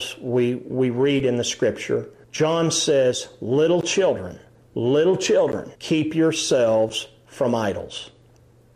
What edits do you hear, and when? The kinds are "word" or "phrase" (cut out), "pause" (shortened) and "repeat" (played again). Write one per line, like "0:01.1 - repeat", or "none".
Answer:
0:02.2 - pause
0:04.5 - pause
0:05.7 - pause